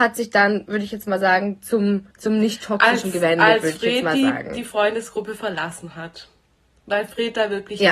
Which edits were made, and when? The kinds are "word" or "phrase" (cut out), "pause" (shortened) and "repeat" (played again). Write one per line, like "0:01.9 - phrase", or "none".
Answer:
0:02.1 - pause